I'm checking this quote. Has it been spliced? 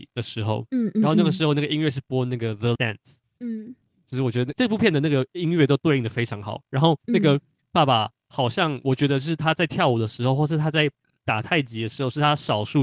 yes; 1 cut; at 2.8 s

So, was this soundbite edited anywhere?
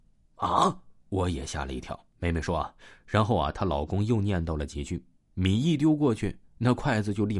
yes; 2 cuts; at 1.0 s, 2.1 s

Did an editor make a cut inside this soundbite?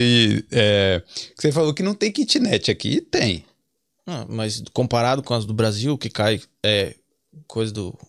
no; 0 cuts

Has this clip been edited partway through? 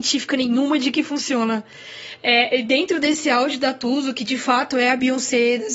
no; 0 cuts

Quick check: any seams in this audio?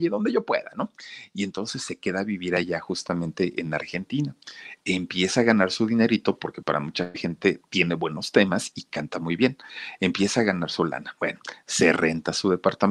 yes; 1 cut; at 6.6 s

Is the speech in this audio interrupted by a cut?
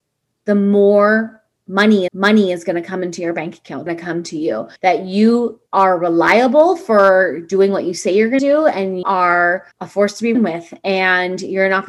yes; 8 cuts; at 2.1 s, 3.9 s, 4.8 s, 5.7 s, 8.4 s, 9.0 s, 9.7 s, 10.3 s

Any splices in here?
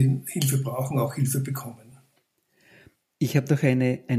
no; 0 cuts

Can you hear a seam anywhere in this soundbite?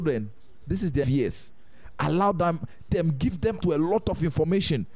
yes; 3 cuts; at 1.0 s, 2.9 s, 3.6 s

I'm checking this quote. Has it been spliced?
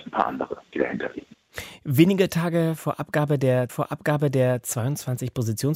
yes; 1 cut; at 3.7 s

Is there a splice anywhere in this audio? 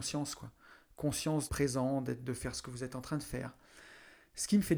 yes; 1 cut; at 1.5 s

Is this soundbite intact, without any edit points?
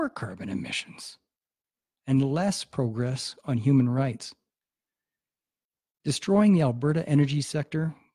yes; 0 cuts

